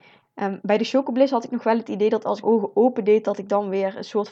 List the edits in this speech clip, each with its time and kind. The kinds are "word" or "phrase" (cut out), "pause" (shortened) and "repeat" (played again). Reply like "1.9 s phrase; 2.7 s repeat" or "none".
2.4 s word